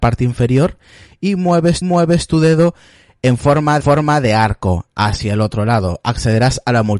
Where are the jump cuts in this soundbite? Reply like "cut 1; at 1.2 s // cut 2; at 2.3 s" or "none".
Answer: cut 1; at 1.8 s // cut 2; at 3.8 s